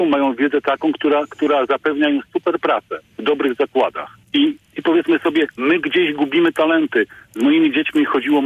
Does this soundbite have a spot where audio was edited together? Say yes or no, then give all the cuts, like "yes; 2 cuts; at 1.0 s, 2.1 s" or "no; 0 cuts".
yes; 1 cut; at 4.2 s